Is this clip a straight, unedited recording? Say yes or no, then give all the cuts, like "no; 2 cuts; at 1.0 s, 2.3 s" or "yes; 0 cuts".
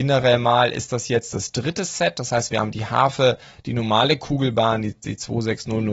yes; 0 cuts